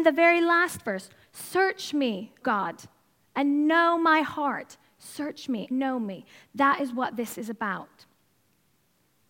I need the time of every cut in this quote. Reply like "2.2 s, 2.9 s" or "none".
2.4 s, 5.7 s